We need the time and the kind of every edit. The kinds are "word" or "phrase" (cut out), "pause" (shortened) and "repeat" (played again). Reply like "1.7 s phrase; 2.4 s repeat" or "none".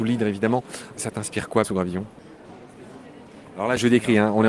1.6 s word